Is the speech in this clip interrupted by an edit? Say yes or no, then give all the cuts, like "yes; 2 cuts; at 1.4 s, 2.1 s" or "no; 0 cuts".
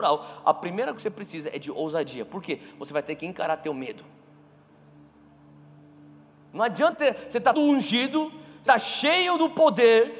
yes; 4 cuts; at 0.9 s, 6.9 s, 7.5 s, 8.7 s